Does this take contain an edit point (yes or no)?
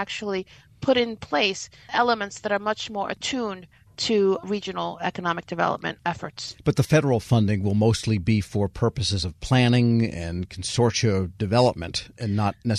no